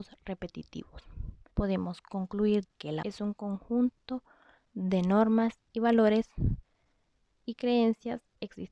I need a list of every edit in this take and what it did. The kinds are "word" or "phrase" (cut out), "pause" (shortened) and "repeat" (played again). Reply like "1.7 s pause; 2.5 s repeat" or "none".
1.5 s pause; 2.6 s word; 3.0 s word; 5.6 s pause